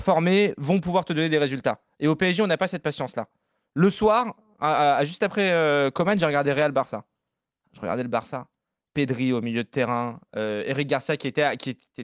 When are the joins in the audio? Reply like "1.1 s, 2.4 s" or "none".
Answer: none